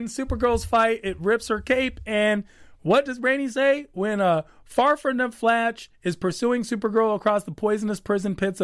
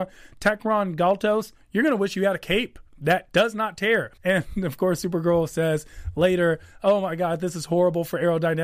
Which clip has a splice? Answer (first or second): second